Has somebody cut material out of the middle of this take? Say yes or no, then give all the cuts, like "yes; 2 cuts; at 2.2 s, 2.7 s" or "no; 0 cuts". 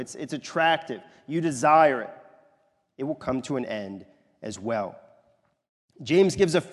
no; 0 cuts